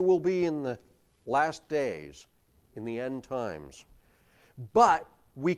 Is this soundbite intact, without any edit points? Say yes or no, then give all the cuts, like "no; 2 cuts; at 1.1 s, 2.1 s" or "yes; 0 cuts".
yes; 0 cuts